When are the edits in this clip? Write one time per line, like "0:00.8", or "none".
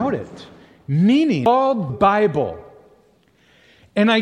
0:01.9